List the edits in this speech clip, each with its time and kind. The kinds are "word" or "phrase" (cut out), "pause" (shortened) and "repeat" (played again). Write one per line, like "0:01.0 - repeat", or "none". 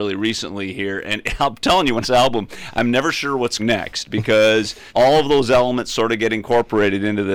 0:02.0 - phrase
0:03.6 - word
0:04.9 - pause